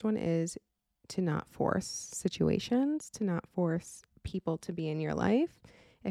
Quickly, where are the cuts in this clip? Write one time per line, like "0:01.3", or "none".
none